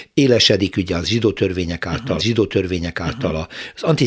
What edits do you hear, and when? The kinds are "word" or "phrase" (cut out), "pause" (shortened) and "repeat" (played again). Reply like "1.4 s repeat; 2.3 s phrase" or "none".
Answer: 2.2 s repeat